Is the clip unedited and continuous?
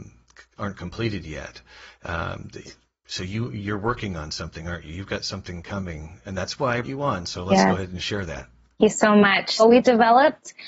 no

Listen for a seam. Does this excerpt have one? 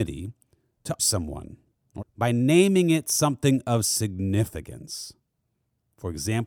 yes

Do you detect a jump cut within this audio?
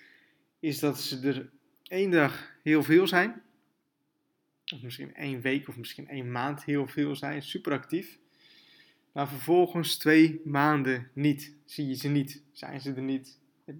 no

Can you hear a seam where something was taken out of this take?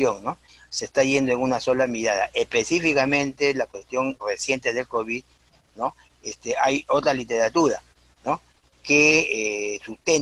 no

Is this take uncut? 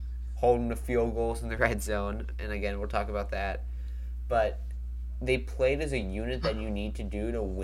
yes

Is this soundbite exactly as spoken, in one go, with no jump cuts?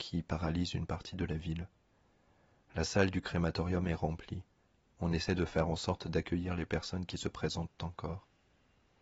yes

